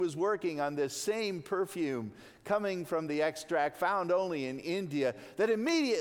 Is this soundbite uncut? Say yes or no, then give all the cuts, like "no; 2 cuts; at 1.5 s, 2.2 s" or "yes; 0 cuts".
yes; 0 cuts